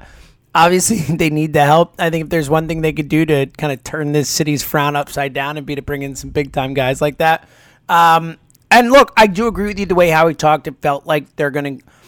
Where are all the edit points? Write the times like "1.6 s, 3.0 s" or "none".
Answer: none